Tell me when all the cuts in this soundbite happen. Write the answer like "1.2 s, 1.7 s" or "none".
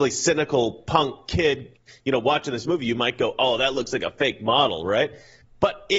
none